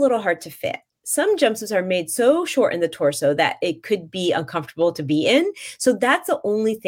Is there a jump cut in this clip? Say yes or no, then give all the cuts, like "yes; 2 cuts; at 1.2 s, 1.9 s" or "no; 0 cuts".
no; 0 cuts